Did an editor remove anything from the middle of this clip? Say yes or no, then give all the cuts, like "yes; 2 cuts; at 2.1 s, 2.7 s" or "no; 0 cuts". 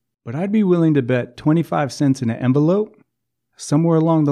no; 0 cuts